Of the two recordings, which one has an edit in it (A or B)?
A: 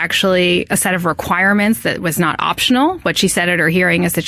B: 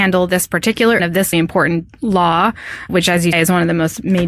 B